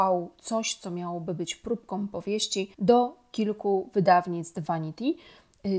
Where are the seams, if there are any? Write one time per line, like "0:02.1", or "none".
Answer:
0:02.7

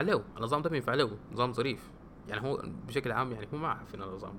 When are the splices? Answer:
none

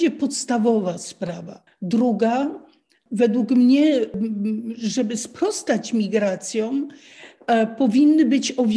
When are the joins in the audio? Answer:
0:01.7

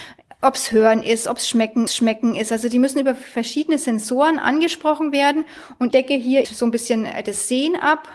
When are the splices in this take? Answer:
0:01.9
0:05.9
0:06.4

